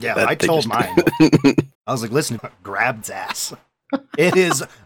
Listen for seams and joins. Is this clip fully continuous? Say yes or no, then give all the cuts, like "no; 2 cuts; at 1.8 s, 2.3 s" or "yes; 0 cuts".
no; 3 cuts; at 1.7 s, 2.4 s, 3.0 s